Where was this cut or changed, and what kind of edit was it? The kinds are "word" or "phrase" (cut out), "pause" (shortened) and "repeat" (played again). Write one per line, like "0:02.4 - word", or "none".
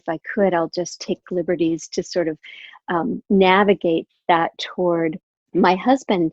0:03.2 - pause
0:05.4 - pause